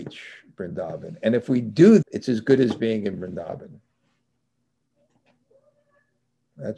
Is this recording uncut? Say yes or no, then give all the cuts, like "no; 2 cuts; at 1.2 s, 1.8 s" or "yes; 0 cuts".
no; 1 cut; at 2.0 s